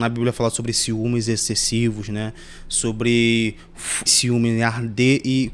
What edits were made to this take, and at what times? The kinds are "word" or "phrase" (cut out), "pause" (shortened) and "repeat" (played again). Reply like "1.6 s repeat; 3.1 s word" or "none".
4.1 s phrase

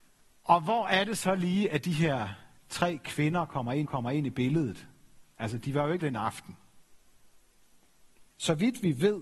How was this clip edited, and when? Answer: 3.8 s repeat; 6.0 s word; 8.3 s pause

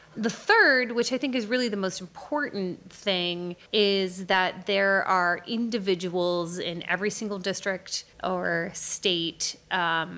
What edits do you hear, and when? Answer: 3.7 s pause; 8.1 s pause

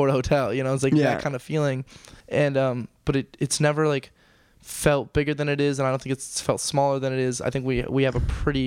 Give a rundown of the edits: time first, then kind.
2.2 s pause

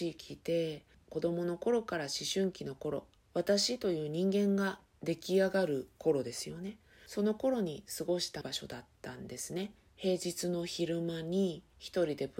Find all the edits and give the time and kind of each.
6.0 s pause

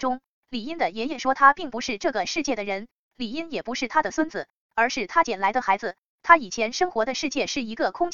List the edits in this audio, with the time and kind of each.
none

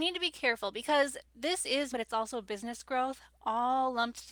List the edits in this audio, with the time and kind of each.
1.3 s pause; 1.9 s word

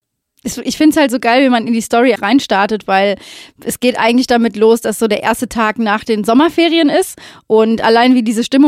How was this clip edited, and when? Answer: 2.2 s word

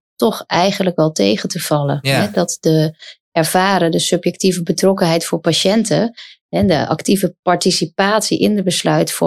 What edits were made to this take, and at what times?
none

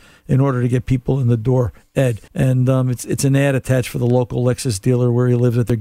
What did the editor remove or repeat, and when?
2.3 s pause

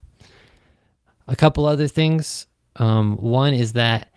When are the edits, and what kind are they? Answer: none

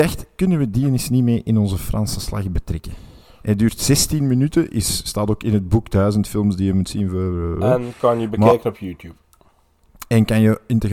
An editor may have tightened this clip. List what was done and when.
none

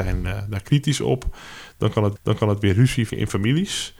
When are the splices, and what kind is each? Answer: 2.2 s repeat; 3.1 s word

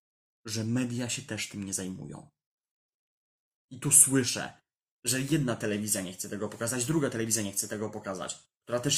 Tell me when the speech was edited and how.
none

